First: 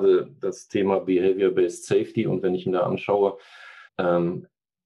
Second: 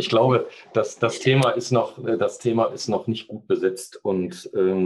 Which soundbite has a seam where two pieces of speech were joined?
first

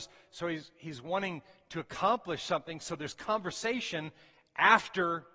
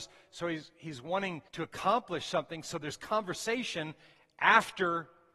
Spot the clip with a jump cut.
second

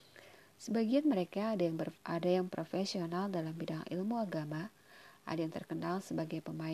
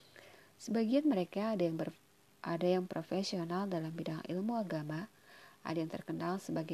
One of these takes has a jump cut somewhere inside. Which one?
first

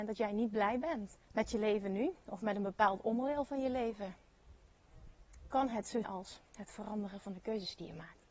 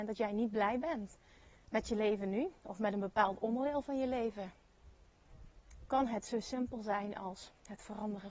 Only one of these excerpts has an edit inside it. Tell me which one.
first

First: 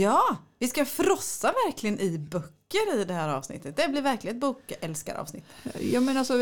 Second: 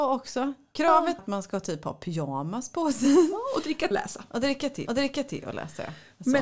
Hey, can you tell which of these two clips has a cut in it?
second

